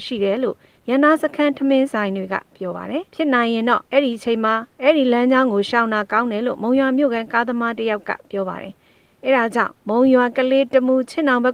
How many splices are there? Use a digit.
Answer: 4